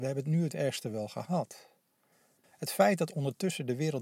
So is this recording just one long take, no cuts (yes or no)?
yes